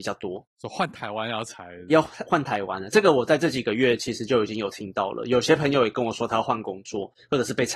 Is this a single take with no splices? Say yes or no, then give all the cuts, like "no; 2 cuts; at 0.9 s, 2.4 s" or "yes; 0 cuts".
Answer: no; 1 cut; at 1.9 s